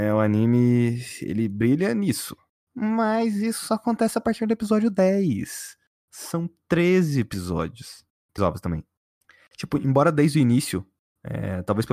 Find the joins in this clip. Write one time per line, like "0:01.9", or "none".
0:08.4